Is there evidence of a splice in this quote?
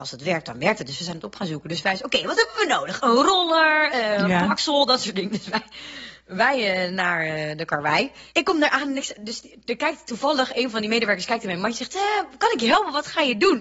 no; 0 cuts

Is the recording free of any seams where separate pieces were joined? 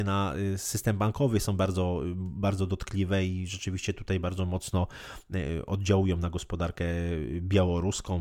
yes; 0 cuts

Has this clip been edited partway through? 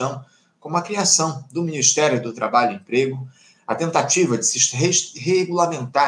no; 0 cuts

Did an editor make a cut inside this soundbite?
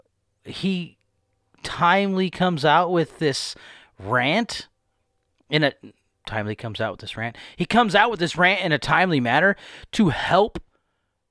no; 0 cuts

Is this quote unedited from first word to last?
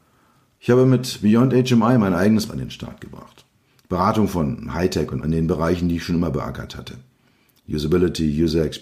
no; 2 cuts; at 2.5 s, 5.2 s

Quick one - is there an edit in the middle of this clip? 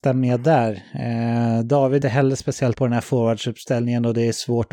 yes; 2 cuts; at 2.0 s, 2.7 s

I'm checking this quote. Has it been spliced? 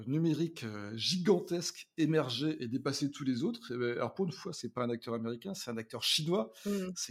no; 0 cuts

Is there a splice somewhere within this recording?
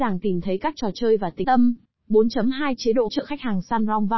yes; 3 cuts; at 1.4 s, 1.8 s, 3.1 s

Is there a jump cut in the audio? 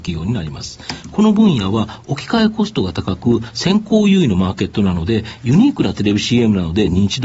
no; 0 cuts

